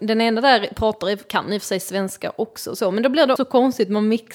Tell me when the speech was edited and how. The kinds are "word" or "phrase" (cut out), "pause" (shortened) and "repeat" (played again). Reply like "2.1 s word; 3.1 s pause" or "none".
3.4 s word